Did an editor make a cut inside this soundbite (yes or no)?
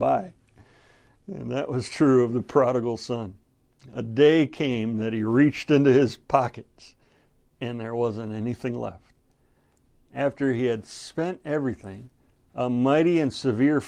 no